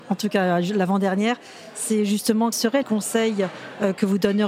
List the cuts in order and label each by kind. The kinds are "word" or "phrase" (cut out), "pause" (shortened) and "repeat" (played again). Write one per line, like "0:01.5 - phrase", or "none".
0:02.5 - word
0:02.8 - word

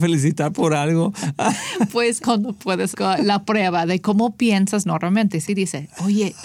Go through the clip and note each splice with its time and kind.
0:02.2 - phrase
0:02.9 - word
0:05.5 - word

